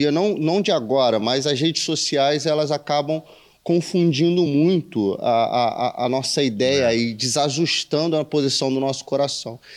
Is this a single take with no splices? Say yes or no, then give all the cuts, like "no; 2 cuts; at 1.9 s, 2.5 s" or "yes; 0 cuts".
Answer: yes; 0 cuts